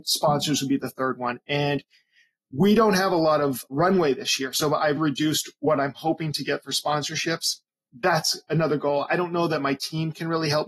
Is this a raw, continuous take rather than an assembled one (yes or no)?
no